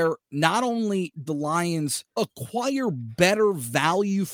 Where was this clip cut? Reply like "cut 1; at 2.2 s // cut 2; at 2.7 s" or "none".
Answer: cut 1; at 1.3 s // cut 2; at 2.1 s

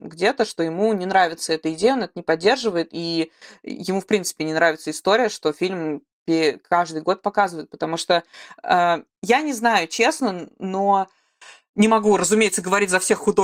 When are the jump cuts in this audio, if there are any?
none

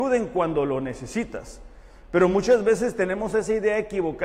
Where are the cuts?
none

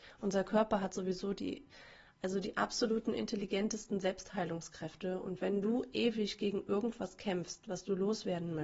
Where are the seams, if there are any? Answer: none

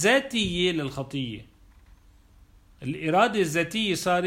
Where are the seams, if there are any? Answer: none

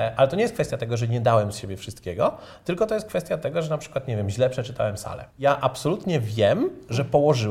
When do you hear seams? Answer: cut 1; at 5.3 s

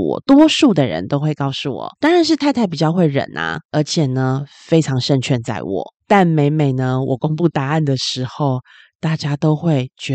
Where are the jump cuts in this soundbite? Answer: cut 1; at 2.0 s // cut 2; at 3.6 s // cut 3; at 6.0 s

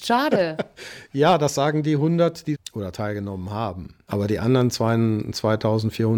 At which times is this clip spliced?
cut 1; at 2.5 s

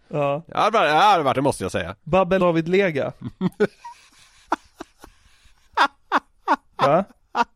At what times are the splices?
cut 1; at 1.3 s // cut 2; at 2.4 s

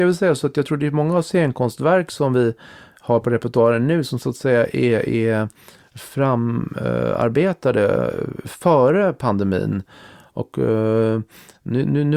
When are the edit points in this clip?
none

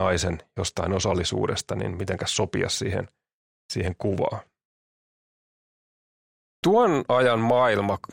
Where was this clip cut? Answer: none

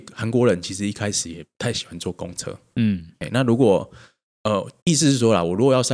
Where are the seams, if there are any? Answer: cut 1; at 4.8 s

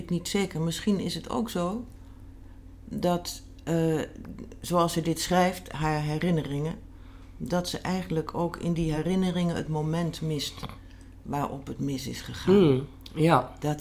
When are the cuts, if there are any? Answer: none

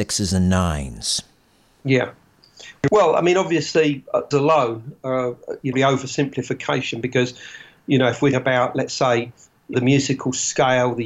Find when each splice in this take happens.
cut 1; at 4.3 s // cut 2; at 5.7 s // cut 3; at 8.3 s // cut 4; at 9.7 s

